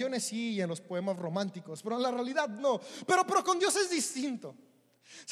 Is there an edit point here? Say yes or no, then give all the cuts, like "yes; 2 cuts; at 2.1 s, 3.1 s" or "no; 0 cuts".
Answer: no; 0 cuts